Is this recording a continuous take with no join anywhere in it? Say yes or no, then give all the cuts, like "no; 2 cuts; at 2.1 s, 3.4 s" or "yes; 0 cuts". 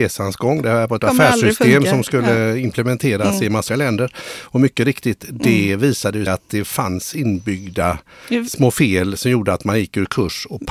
no; 3 cuts; at 1.0 s, 3.7 s, 6.3 s